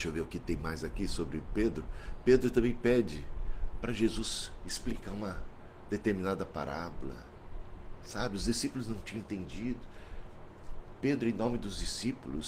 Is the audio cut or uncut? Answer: uncut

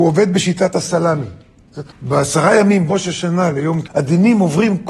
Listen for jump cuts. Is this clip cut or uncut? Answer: cut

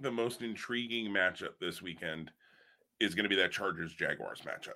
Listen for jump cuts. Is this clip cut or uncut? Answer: uncut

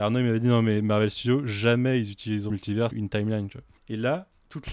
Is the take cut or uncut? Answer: cut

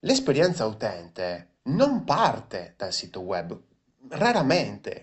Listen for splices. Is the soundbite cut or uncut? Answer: cut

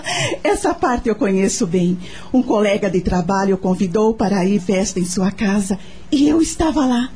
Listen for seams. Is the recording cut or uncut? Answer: cut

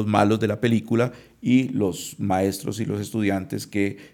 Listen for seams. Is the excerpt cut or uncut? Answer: uncut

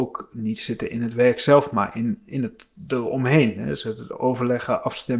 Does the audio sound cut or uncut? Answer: uncut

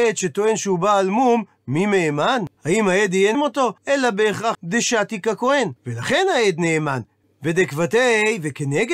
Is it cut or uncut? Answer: cut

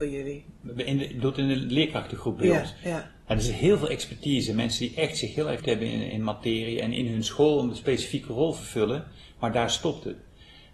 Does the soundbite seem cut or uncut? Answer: cut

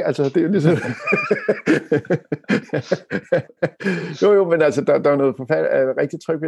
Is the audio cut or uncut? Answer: uncut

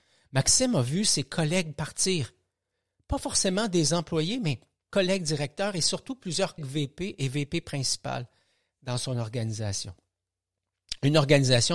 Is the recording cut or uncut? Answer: cut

